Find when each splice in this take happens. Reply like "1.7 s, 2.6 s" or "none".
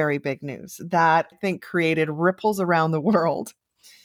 1.3 s